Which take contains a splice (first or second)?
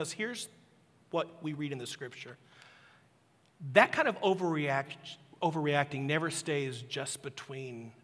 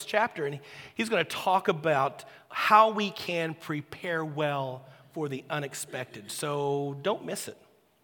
second